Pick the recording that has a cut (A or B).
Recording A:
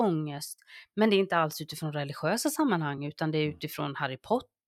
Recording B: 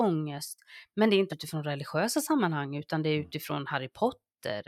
B